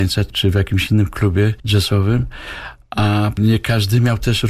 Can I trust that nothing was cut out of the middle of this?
no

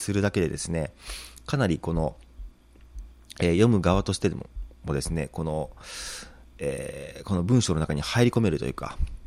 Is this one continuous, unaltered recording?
yes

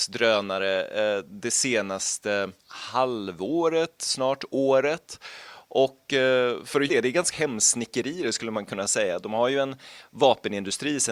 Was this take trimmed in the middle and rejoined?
yes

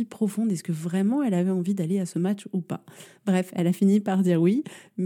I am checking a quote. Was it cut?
no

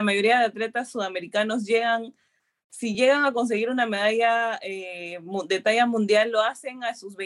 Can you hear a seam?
no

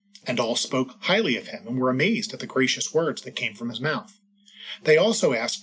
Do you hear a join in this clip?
no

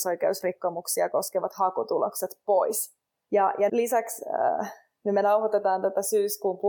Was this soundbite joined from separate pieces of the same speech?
yes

